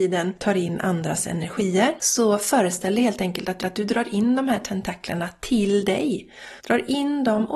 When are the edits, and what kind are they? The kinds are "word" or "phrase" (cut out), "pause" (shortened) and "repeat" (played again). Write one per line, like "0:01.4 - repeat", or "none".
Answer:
0:03.6 - repeat
0:06.6 - pause